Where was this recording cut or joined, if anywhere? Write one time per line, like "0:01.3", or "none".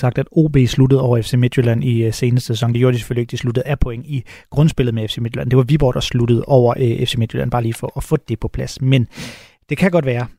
none